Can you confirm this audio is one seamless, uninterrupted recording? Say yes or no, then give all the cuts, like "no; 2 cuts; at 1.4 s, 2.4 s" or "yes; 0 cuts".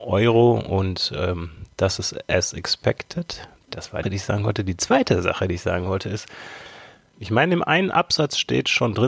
no; 1 cut; at 4.0 s